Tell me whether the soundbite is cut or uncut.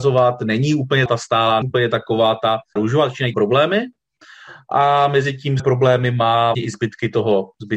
cut